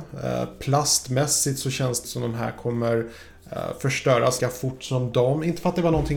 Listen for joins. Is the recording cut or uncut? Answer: cut